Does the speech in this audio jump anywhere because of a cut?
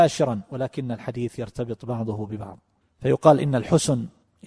no; 0 cuts

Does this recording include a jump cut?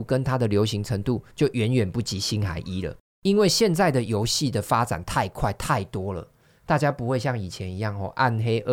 yes; 1 cut; at 1.3 s

